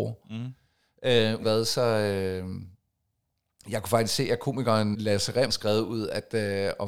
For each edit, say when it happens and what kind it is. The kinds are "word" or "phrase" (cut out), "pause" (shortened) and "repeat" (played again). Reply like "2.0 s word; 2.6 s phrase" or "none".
1.4 s word; 4.9 s word; 5.5 s word